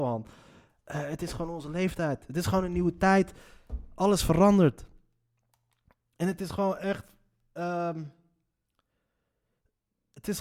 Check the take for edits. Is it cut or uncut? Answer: uncut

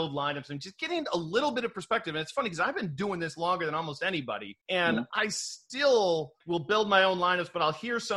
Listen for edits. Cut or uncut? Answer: cut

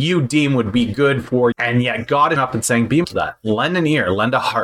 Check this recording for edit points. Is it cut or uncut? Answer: cut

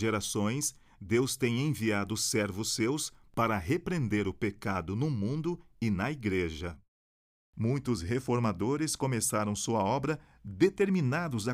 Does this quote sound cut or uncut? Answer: uncut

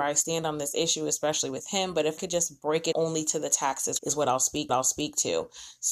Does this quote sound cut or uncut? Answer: cut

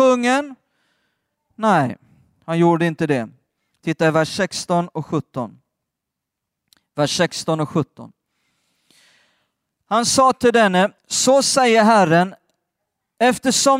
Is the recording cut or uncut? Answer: cut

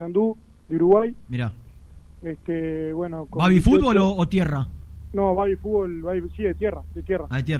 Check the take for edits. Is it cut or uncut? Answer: uncut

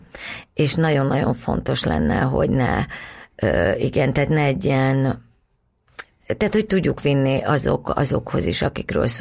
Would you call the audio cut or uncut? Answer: uncut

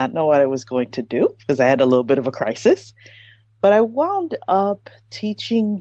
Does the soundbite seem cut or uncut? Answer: uncut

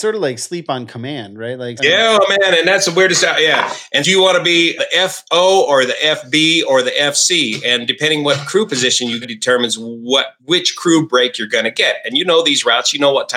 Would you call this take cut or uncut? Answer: cut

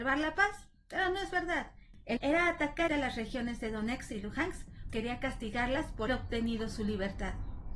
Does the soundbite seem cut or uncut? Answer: cut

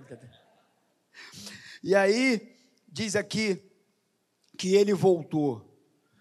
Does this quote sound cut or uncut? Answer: uncut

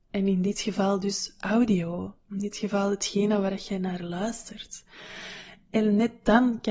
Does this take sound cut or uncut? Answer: uncut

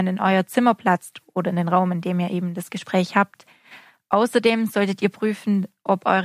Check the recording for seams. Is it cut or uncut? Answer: uncut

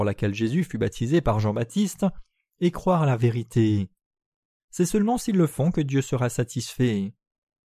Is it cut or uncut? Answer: uncut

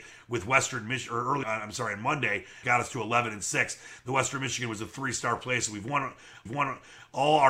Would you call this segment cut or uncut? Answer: cut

